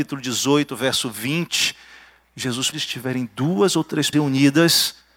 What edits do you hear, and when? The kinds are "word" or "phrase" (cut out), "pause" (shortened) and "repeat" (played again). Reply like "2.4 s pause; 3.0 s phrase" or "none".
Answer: 2.7 s phrase; 4.1 s word

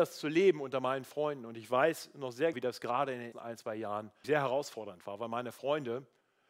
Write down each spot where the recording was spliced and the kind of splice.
2.5 s word; 3.3 s word; 4.2 s word

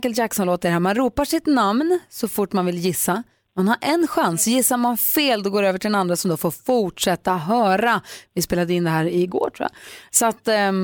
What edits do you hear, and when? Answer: none

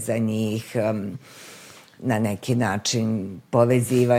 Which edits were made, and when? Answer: none

